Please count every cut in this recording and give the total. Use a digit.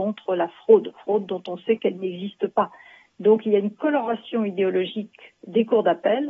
0